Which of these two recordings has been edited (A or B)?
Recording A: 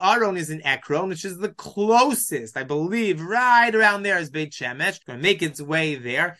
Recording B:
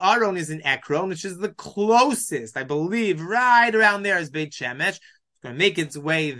A